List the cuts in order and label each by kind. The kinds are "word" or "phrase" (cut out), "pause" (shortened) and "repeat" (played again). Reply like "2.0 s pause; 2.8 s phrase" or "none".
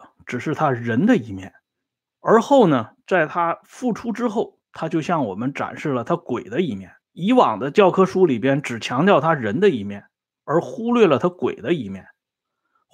2.1 s word; 4.6 s pause; 7.0 s pause